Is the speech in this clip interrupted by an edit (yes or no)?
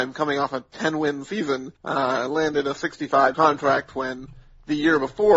yes